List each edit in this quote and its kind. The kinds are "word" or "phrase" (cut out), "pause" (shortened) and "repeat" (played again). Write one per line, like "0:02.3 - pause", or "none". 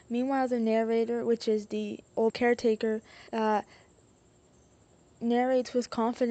0:02.3 - word
0:03.3 - pause